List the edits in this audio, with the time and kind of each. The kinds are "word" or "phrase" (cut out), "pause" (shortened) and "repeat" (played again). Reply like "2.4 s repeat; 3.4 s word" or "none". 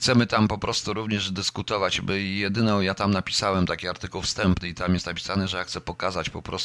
none